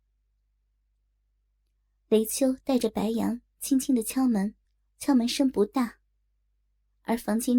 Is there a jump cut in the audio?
yes; 1 cut; at 4.6 s

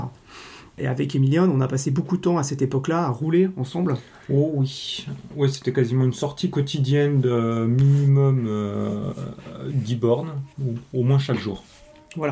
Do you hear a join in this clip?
yes; 1 cut; at 10.5 s

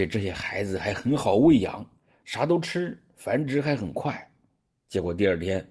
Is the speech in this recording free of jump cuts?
yes; 0 cuts

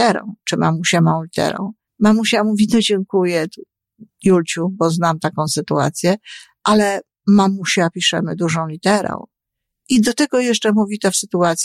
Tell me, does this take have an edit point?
yes; 2 cuts; at 1.9 s, 4.1 s

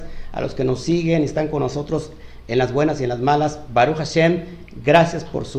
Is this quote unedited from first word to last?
yes; 0 cuts

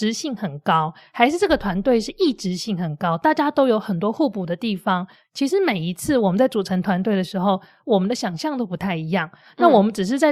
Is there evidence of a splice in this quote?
no; 0 cuts

